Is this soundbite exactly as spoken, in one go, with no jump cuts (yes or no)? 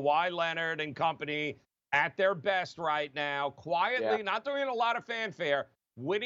yes